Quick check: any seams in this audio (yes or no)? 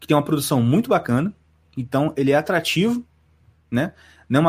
no